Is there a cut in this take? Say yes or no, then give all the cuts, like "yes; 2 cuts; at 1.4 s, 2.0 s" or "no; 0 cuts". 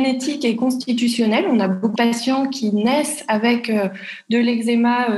yes; 1 cut; at 2.0 s